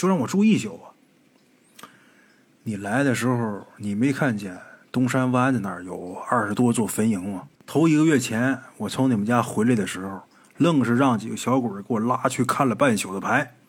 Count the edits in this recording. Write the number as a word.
one